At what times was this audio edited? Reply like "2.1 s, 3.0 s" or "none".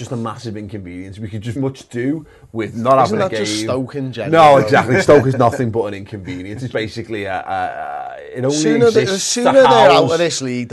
1.6 s, 6.7 s